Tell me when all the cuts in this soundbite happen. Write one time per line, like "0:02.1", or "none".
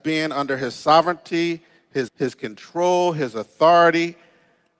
0:02.1